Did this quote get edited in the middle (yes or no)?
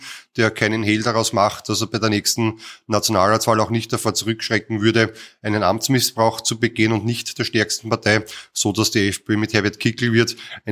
no